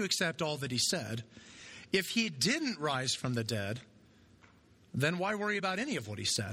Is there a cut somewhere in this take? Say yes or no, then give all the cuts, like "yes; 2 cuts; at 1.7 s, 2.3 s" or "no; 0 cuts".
no; 0 cuts